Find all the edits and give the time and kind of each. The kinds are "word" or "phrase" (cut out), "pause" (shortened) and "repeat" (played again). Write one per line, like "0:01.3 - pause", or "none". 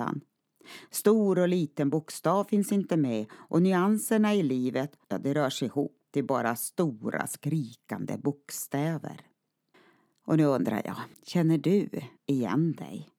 0:05.0 - pause
0:09.7 - pause
0:11.1 - pause
0:12.2 - pause